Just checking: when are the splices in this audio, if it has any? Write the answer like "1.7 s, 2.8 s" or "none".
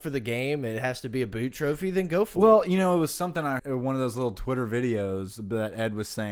3.6 s